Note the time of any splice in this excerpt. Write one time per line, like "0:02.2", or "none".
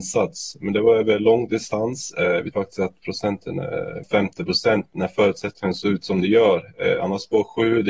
0:02.5
0:04.0

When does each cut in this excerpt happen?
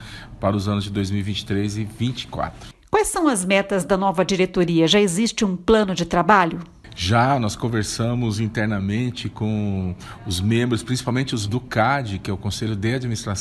0:11.5

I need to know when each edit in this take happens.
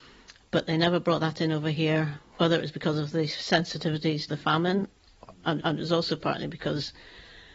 0:04.3
0:05.6

